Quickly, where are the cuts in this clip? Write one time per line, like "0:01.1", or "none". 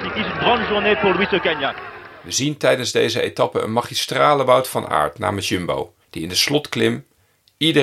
0:06.0